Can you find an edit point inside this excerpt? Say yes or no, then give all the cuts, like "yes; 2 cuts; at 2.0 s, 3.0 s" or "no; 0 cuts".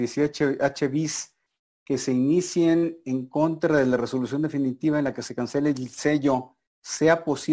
no; 0 cuts